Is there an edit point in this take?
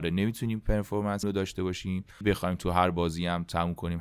yes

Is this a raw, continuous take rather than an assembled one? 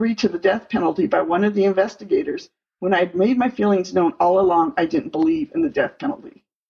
yes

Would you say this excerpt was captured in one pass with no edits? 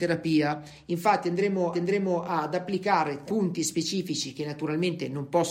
no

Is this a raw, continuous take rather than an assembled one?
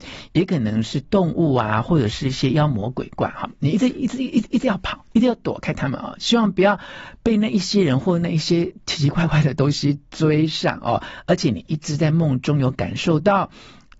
yes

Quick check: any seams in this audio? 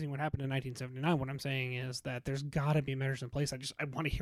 no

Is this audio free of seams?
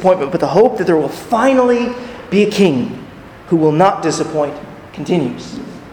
no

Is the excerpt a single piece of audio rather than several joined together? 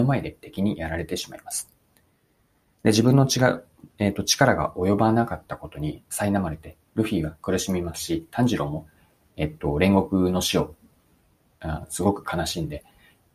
yes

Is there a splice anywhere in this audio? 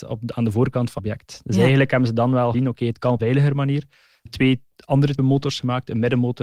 yes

